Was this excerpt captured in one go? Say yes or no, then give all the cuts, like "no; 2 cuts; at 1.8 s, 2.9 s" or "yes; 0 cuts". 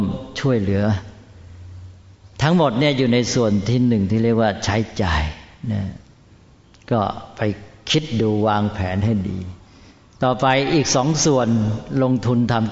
yes; 0 cuts